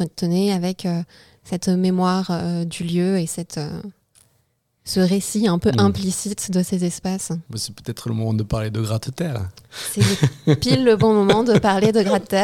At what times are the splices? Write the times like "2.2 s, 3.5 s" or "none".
7.5 s